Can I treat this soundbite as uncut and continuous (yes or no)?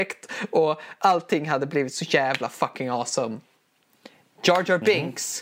yes